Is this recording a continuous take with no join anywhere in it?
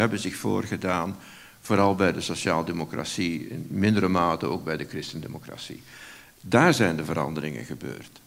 yes; 0 cuts

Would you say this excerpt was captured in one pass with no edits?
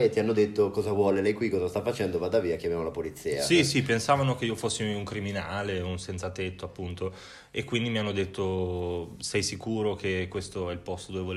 yes; 0 cuts

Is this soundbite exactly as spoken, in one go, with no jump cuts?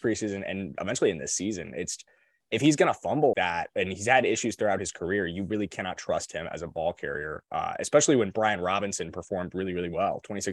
no; 1 cut; at 3.3 s

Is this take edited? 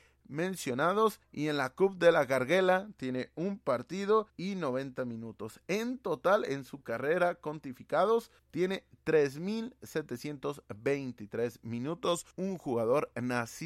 yes; 4 cuts; at 1.2 s, 4.3 s, 8.4 s, 12.3 s

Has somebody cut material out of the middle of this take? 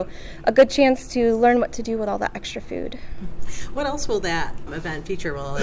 yes; 1 cut; at 4.7 s

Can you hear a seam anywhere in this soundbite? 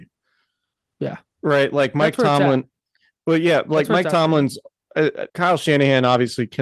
yes; 1 cut; at 5.3 s

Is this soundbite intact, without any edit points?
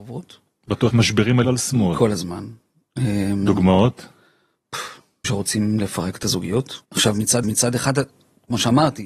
no; 5 cuts; at 0.9 s, 1.4 s, 5.2 s, 6.8 s, 7.4 s

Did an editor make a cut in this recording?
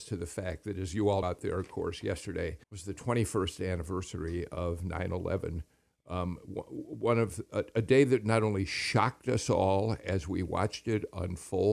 yes; 2 cuts; at 1.2 s, 2.6 s

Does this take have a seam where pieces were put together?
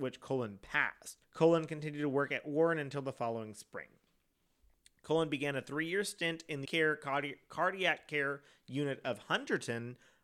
yes; 2 cuts; at 1.2 s, 6.7 s

